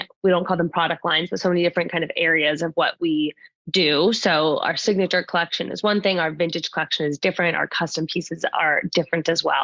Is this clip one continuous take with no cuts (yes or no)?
yes